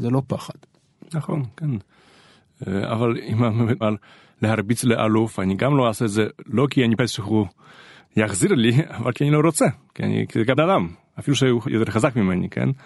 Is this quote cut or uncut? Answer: cut